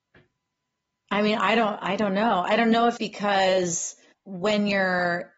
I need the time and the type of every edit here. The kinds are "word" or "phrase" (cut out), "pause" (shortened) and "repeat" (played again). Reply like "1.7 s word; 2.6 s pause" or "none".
3.0 s word; 4.1 s word

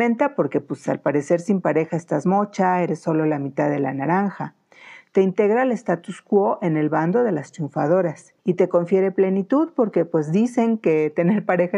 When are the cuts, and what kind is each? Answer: 8.4 s pause

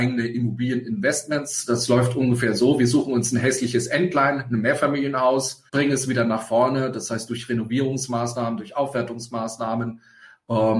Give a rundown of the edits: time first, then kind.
5.7 s pause

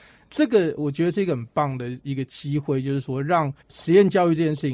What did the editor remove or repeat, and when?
3.6 s pause

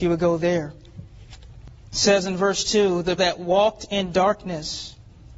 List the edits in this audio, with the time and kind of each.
1.8 s pause; 3.2 s word

